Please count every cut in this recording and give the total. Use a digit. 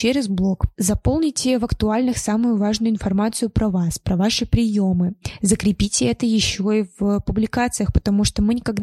0